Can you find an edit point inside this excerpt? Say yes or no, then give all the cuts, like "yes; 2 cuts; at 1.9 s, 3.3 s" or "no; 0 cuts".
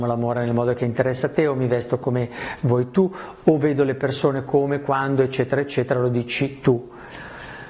no; 0 cuts